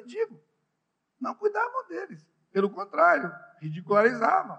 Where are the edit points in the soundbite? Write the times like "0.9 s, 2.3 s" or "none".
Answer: none